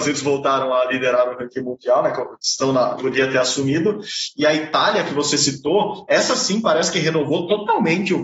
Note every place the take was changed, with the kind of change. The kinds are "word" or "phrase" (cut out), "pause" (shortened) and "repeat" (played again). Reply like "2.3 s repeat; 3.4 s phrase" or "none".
3.0 s phrase